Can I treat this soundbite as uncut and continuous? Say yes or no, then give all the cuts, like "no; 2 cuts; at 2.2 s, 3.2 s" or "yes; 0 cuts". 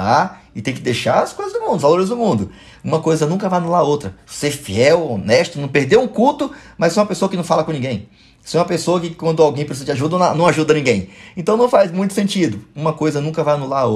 yes; 0 cuts